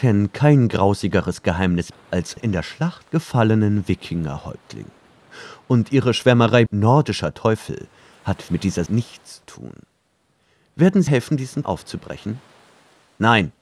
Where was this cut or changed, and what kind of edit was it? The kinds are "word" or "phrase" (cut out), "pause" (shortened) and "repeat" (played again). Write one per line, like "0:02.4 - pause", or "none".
0:01.9 - word
0:02.4 - word
0:06.7 - word
0:08.5 - word
0:08.9 - word
0:09.4 - word
0:11.1 - word
0:11.6 - word